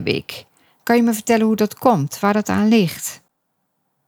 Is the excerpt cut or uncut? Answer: uncut